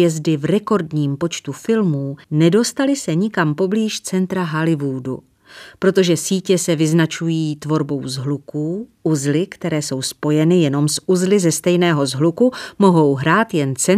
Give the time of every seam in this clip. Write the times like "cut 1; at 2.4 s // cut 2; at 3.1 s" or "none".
cut 1; at 2.2 s

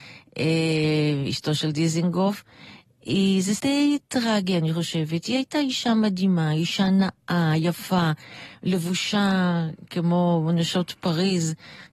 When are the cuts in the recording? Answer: cut 1; at 3.6 s

